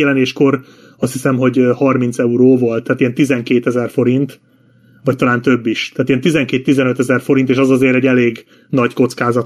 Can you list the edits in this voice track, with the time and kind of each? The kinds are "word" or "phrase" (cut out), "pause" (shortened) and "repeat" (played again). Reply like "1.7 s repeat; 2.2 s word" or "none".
none